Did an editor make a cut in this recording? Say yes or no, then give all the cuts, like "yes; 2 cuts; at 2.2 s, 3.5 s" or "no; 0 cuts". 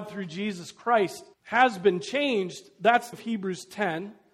yes; 2 cuts; at 1.3 s, 3.1 s